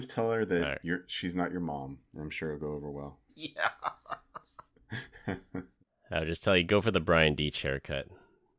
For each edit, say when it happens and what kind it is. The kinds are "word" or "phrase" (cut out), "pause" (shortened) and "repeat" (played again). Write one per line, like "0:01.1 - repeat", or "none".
0:02.1 - pause
0:03.3 - pause